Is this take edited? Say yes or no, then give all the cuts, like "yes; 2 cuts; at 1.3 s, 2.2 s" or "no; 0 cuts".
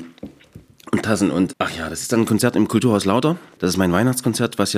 yes; 1 cut; at 1.5 s